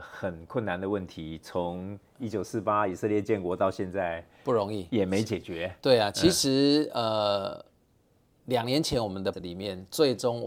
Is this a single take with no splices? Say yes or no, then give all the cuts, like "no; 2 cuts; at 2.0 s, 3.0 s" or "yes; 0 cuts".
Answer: no; 1 cut; at 9.3 s